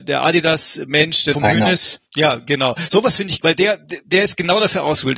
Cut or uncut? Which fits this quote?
cut